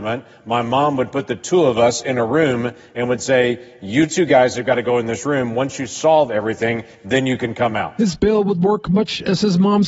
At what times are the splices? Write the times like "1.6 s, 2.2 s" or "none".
none